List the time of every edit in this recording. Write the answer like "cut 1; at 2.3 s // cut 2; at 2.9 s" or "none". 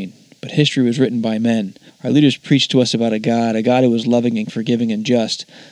cut 1; at 1.9 s // cut 2; at 4.5 s